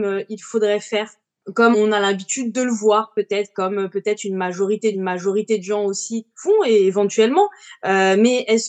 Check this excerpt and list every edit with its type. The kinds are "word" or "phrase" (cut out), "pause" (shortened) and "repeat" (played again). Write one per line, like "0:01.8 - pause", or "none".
0:01.7 - word
0:04.9 - repeat
0:06.3 - pause